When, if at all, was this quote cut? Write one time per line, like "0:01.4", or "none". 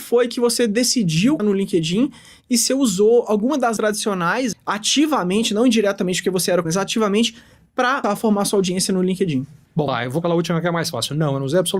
0:01.4
0:02.7
0:03.8
0:04.5
0:06.6
0:08.0
0:09.9
0:10.2